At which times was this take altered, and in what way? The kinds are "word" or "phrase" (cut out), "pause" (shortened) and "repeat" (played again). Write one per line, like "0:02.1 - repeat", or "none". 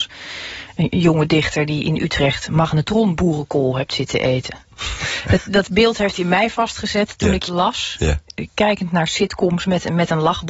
0:05.5 - word
0:06.1 - phrase
0:07.5 - word